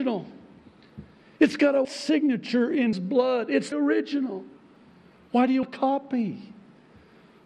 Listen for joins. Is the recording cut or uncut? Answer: cut